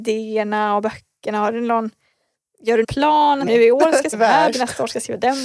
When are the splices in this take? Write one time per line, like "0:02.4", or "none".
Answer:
0:02.8
0:03.5
0:04.1
0:04.5